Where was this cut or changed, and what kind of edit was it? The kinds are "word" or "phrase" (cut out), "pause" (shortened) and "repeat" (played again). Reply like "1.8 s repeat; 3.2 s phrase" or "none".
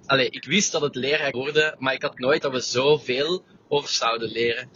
1.3 s word; 2.4 s word; 3.9 s word